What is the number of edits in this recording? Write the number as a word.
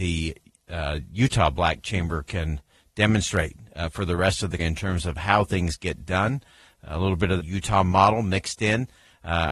two